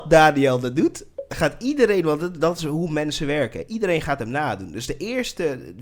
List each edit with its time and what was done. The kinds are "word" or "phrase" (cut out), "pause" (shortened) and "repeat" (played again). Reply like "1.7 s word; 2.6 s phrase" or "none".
none